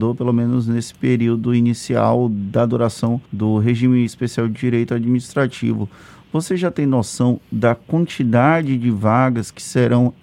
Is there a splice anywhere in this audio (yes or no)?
yes